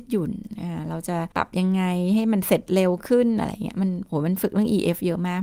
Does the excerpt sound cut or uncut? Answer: cut